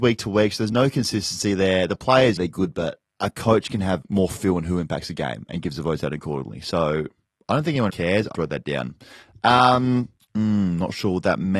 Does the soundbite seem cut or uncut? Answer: cut